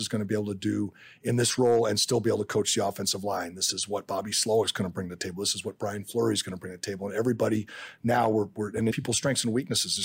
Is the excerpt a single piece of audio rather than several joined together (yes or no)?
no